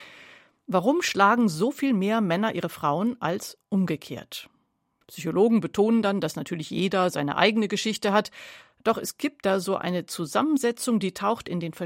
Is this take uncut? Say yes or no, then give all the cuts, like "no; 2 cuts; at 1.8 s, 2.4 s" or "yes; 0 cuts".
yes; 0 cuts